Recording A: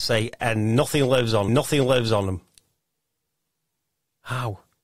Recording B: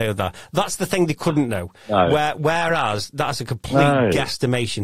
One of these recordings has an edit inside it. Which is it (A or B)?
A